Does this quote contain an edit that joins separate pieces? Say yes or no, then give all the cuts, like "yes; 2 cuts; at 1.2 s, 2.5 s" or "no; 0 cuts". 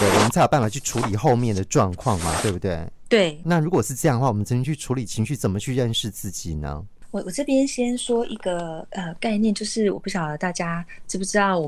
yes; 1 cut; at 3.4 s